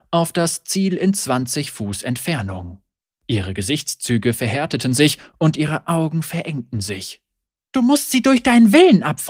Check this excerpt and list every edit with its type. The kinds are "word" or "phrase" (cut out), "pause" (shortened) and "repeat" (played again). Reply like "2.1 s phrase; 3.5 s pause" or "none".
none